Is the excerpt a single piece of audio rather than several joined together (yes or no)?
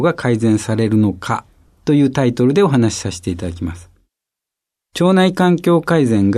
yes